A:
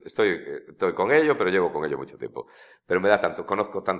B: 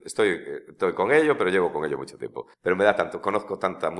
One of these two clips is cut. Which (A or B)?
B